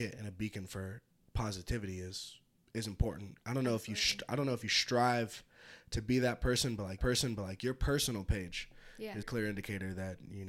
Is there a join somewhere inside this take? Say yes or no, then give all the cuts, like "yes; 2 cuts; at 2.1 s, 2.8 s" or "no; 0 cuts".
yes; 2 cuts; at 7.0 s, 9.2 s